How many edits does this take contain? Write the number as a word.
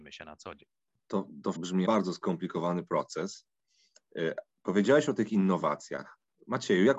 two